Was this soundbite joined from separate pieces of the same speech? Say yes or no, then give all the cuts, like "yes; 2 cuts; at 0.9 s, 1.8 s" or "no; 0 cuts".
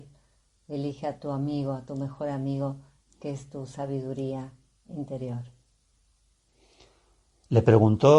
no; 0 cuts